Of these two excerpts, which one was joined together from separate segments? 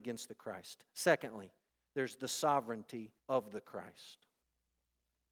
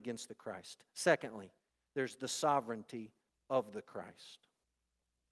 first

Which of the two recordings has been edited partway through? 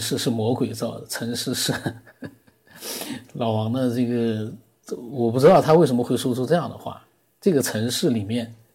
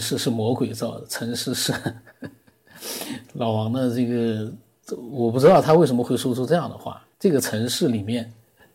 second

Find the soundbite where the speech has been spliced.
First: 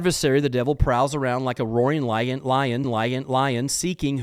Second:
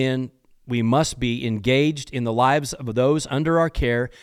first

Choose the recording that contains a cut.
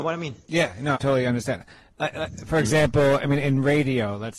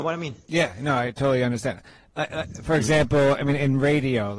first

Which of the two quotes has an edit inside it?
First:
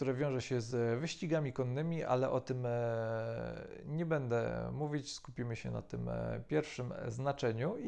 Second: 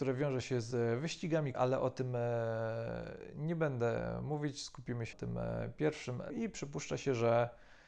second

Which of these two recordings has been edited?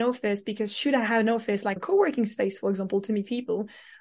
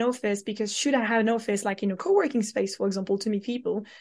first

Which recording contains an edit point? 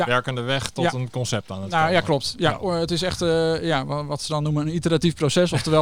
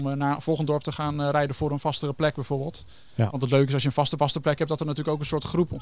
second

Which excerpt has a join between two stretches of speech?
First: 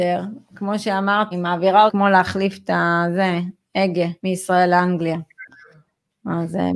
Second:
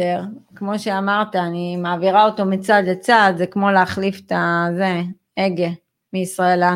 first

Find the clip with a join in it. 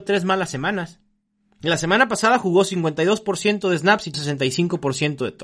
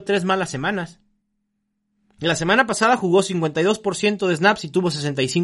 first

